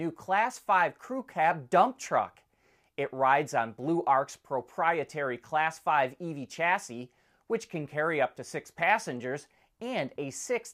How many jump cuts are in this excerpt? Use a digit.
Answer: 0